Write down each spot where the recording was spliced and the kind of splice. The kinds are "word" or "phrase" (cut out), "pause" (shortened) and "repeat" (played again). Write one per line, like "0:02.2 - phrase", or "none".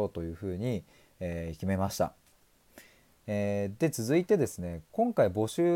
none